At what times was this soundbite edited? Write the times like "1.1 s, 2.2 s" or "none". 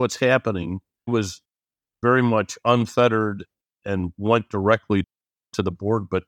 1.1 s